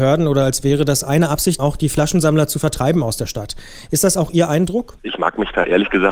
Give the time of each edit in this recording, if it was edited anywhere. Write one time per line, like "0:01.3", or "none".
0:01.6